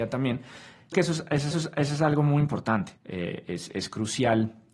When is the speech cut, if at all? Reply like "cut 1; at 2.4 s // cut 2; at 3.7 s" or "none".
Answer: cut 1; at 0.9 s // cut 2; at 1.5 s // cut 3; at 3.0 s // cut 4; at 3.7 s